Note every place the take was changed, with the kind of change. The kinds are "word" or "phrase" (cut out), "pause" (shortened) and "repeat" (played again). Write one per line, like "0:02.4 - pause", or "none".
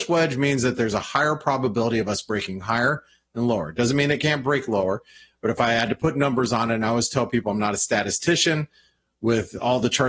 none